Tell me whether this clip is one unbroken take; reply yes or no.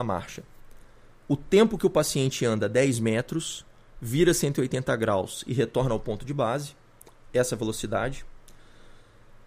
yes